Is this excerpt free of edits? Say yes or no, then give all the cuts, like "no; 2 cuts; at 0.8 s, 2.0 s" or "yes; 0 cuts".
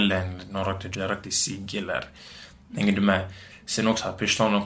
no; 1 cut; at 0.9 s